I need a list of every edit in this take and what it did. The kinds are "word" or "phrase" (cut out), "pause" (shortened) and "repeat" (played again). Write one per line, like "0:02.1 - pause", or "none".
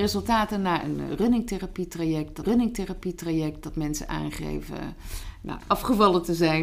0:02.4 - repeat
0:05.6 - phrase